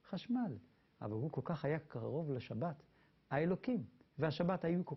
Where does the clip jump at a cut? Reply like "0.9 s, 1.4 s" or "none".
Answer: none